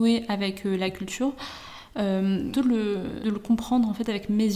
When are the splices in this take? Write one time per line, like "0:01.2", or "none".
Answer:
0:02.5
0:03.2